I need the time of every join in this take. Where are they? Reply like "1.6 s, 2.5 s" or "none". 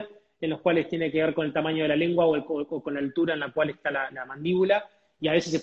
none